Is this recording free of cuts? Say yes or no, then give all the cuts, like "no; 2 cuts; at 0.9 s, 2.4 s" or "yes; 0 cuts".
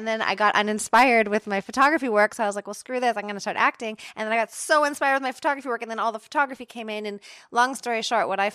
yes; 0 cuts